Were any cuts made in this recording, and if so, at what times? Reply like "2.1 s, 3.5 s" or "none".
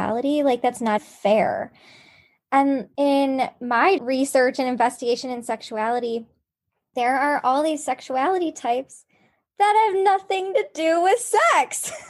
1.0 s, 4.0 s

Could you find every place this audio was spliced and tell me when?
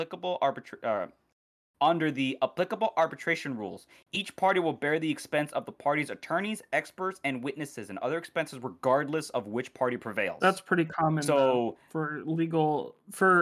none

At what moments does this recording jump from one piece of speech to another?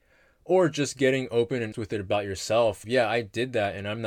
1.7 s, 2.8 s

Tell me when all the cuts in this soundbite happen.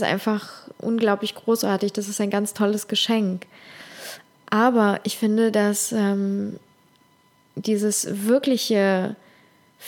none

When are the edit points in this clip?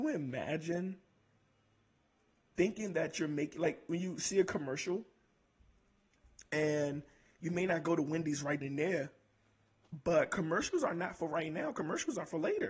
8.6 s

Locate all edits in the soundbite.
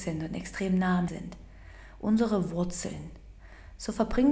1.1 s

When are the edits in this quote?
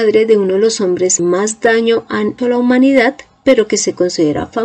1.2 s, 2.4 s

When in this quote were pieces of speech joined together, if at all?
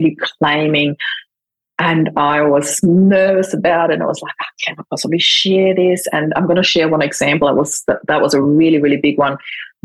none

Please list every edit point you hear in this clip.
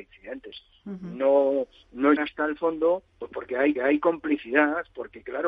2.2 s, 3.1 s, 3.8 s

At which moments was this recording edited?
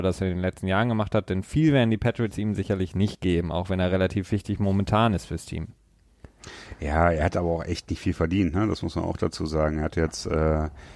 none

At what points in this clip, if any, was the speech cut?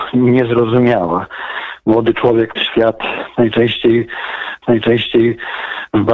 2.6 s, 4.6 s

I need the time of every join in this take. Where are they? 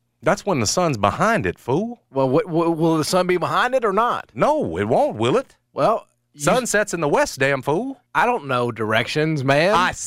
5.7 s, 8.1 s

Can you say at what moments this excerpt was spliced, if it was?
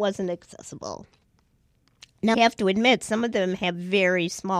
2.3 s

